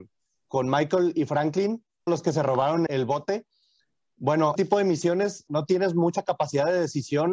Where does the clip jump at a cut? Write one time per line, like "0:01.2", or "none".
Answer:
0:02.1
0:02.9
0:04.6
0:05.5